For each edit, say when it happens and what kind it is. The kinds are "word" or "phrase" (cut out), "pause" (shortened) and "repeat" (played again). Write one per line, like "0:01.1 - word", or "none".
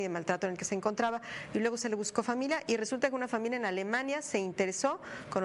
none